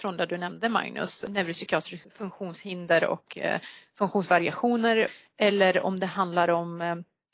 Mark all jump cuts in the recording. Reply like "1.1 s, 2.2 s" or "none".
none

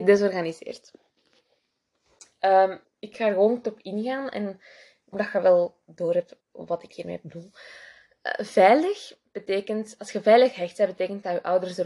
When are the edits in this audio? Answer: 2.8 s, 3.6 s, 5.1 s, 6.4 s

